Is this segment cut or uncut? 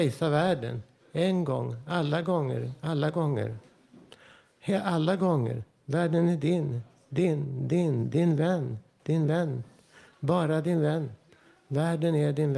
uncut